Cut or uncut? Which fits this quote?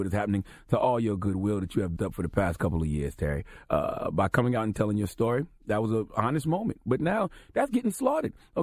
cut